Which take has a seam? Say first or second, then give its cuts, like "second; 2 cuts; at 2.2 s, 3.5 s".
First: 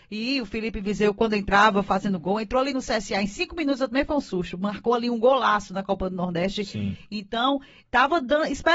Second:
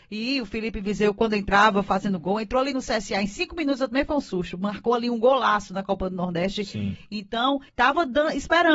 second; 1 cut; at 7.7 s